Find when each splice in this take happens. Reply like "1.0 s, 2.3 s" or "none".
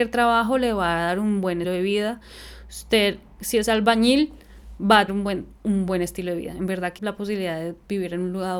1.6 s, 5.1 s, 7.0 s